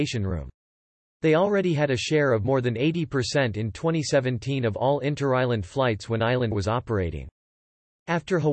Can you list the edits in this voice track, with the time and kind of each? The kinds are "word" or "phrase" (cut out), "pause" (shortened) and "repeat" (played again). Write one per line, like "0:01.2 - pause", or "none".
0:06.5 - word